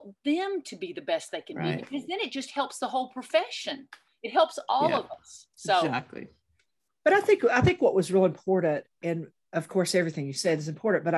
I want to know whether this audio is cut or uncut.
uncut